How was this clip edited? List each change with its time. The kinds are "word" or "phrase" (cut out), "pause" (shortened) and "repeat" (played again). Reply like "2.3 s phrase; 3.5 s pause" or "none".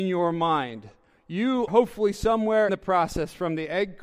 1.7 s word; 2.7 s word